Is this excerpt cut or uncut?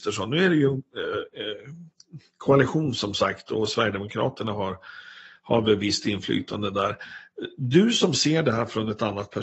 uncut